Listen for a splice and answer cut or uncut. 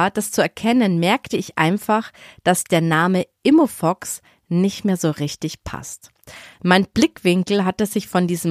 uncut